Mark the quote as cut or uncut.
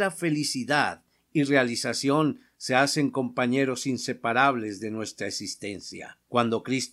uncut